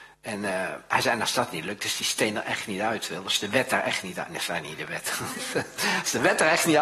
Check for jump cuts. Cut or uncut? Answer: uncut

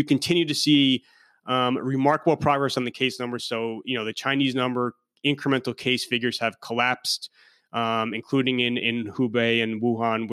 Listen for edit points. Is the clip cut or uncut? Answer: uncut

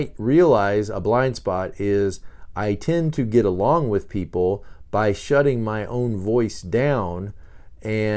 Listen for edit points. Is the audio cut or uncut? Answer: uncut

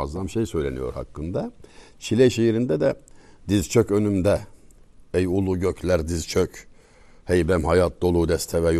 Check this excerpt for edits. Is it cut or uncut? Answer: uncut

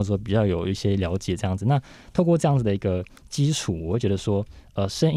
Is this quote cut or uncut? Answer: uncut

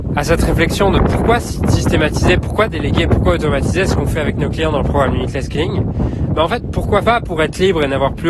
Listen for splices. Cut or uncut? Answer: cut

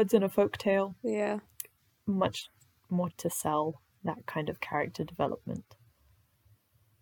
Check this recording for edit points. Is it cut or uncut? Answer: cut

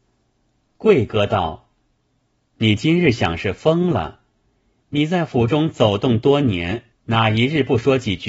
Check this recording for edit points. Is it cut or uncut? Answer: cut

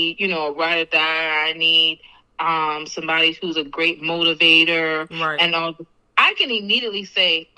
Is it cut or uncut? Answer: uncut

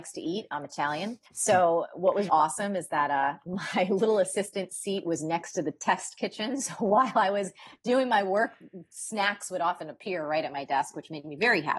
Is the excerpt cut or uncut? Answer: cut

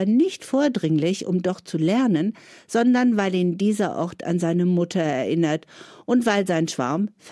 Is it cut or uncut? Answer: uncut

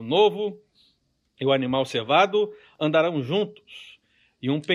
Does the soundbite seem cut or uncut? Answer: uncut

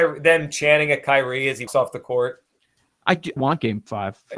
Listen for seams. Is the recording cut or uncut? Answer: cut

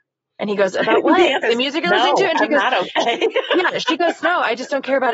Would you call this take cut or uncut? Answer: cut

